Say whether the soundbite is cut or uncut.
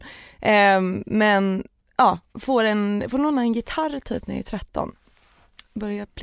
cut